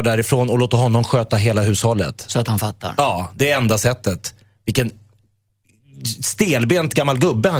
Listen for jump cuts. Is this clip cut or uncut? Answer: uncut